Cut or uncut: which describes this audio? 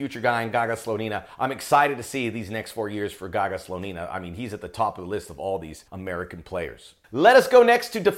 cut